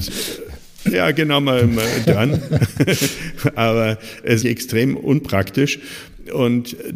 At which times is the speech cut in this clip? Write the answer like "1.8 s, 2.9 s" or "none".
0.9 s, 2.0 s, 4.4 s